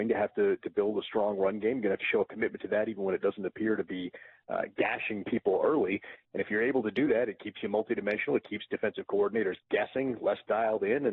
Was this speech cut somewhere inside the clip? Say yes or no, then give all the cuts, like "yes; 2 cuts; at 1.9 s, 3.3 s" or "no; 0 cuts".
no; 0 cuts